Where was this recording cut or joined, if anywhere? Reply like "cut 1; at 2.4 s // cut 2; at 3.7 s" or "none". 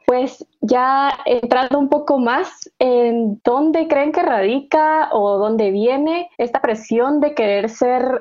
cut 1; at 6.3 s